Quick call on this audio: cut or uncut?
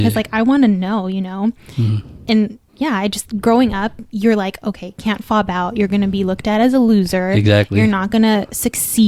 cut